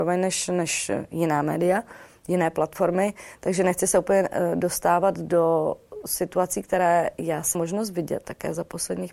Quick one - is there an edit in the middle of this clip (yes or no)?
yes